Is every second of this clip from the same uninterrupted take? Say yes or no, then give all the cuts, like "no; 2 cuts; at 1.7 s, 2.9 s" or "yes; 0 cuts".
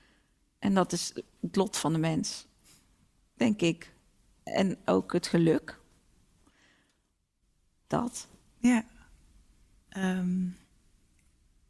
yes; 0 cuts